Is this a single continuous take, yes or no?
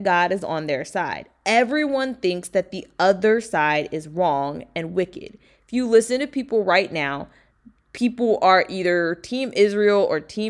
yes